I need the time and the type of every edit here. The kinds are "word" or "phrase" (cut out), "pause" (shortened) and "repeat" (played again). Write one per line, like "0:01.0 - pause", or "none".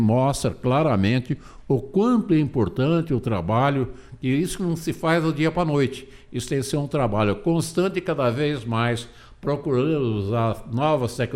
none